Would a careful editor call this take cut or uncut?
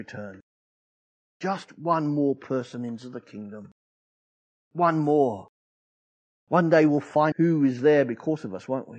cut